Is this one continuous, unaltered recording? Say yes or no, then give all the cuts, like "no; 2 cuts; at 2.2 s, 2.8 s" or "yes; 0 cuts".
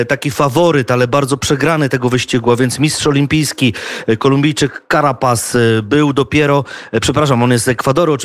yes; 0 cuts